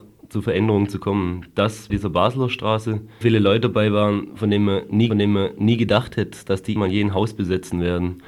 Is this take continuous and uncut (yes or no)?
no